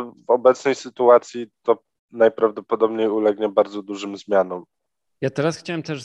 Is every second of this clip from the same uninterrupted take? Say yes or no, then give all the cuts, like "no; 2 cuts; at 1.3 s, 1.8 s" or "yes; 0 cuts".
yes; 0 cuts